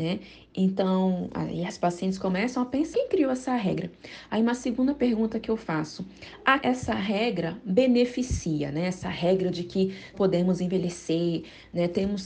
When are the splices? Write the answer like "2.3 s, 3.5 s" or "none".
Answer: 2.9 s, 6.6 s, 10.1 s